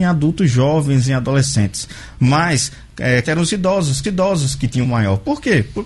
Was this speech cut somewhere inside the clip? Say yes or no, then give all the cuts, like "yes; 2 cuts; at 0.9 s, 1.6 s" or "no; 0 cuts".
yes; 3 cuts; at 3.2 s, 4.0 s, 4.8 s